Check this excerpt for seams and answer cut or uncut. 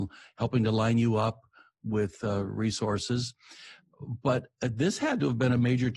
uncut